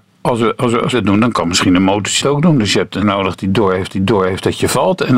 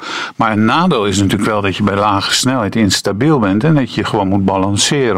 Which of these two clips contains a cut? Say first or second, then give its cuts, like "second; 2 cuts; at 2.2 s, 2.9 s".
first; 4 cuts; at 0.9 s, 2.2 s, 3.0 s, 3.9 s